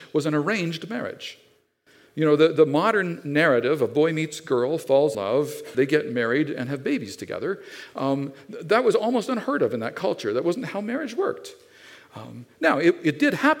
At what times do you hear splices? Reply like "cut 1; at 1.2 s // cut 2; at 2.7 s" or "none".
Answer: cut 1; at 5.1 s // cut 2; at 5.7 s